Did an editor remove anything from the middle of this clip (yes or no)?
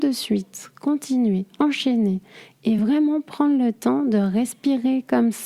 no